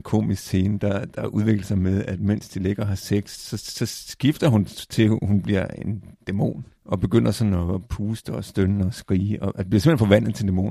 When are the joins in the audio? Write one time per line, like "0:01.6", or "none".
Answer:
0:03.4
0:06.7